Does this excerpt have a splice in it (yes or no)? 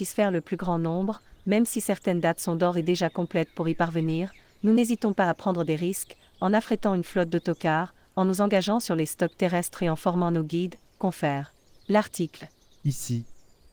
no